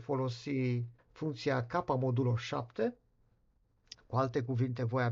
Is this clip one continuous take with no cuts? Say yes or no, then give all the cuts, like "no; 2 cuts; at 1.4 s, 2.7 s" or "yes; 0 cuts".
no; 1 cut; at 1.0 s